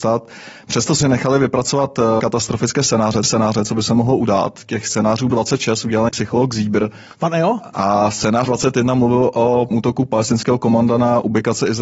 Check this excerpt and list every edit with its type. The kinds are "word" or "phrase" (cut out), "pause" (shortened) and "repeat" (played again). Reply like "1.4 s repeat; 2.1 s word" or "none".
1.0 s word; 2.2 s word; 3.2 s repeat; 5.3 s word; 6.1 s word; 8.5 s word; 9.7 s word